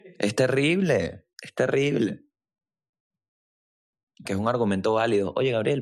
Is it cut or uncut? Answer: cut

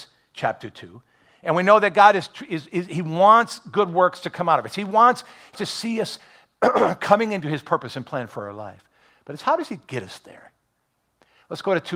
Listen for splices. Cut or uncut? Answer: cut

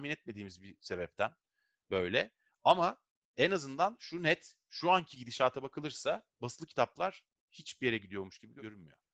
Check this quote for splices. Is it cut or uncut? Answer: uncut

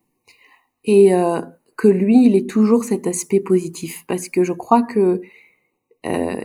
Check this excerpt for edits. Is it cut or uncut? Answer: uncut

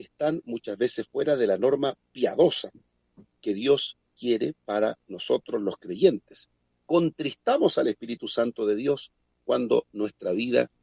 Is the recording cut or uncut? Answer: uncut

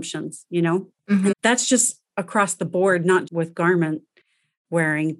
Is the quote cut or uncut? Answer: cut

